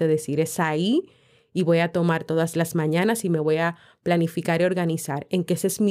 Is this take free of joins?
yes; 0 cuts

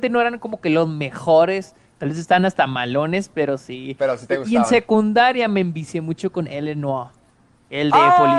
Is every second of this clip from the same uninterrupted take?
yes; 0 cuts

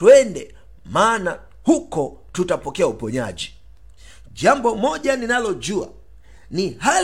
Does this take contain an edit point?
no; 0 cuts

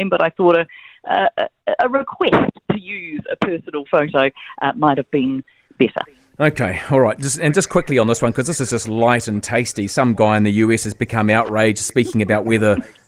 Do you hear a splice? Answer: no; 0 cuts

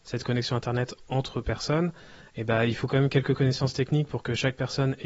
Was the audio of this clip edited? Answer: no; 0 cuts

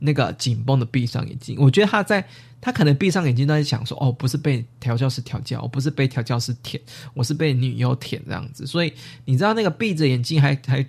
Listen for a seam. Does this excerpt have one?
no; 0 cuts

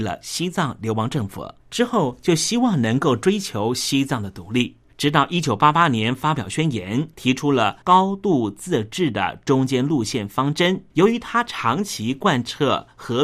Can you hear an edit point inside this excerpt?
yes; 5 cuts; at 1.6 s, 4.9 s, 7.1 s, 7.8 s, 10.9 s

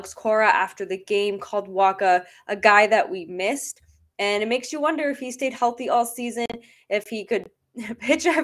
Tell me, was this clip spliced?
no; 0 cuts

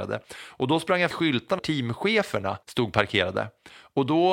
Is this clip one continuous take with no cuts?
no; 3 cuts; at 1.1 s, 1.6 s, 2.6 s

